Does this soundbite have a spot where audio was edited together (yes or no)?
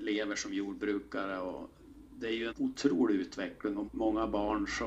yes